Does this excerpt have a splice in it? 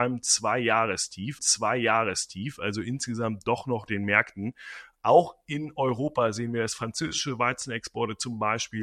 yes; 2 cuts; at 1.4 s, 3.9 s

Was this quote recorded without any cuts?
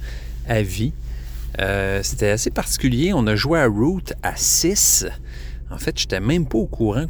yes; 0 cuts

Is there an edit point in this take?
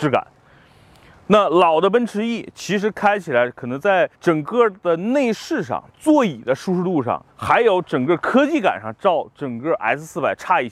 yes; 3 cuts; at 4.1 s, 5.9 s, 7.3 s

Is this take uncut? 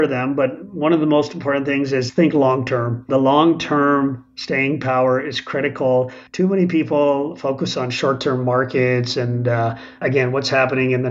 no; 1 cut; at 6.3 s

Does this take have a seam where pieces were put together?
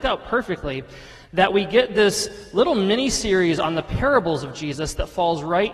no; 0 cuts

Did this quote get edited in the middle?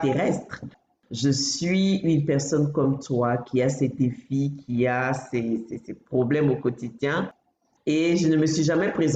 no; 0 cuts

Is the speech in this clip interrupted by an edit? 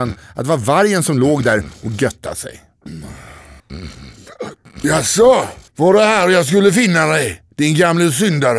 yes; 3 cuts; at 3.6 s, 5.7 s, 7.5 s

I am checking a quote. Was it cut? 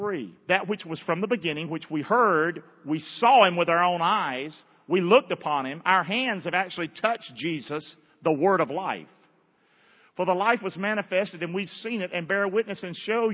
no; 0 cuts

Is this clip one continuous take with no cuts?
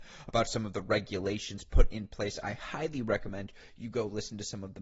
yes; 0 cuts

